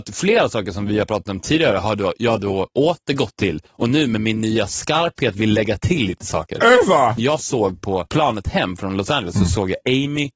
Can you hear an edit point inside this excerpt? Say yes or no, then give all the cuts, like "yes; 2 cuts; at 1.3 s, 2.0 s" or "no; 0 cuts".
no; 0 cuts